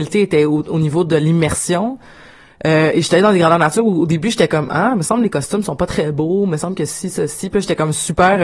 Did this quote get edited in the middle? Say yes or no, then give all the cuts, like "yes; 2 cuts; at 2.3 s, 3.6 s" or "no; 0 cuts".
no; 0 cuts